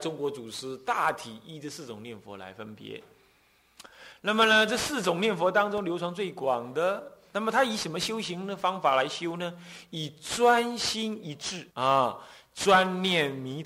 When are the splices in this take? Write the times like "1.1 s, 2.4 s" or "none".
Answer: 11.7 s